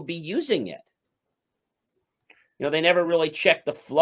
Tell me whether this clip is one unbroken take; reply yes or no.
yes